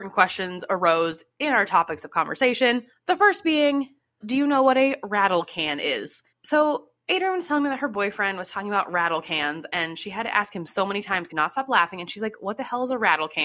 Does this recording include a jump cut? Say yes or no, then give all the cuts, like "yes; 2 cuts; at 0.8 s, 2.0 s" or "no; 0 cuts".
yes; 4 cuts; at 2.9 s, 4.2 s, 6.3 s, 11.3 s